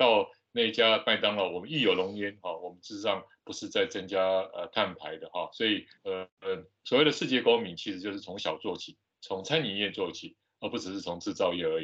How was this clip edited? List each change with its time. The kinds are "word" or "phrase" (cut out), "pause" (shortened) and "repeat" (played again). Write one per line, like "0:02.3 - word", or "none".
0:06.0 - pause
0:09.0 - pause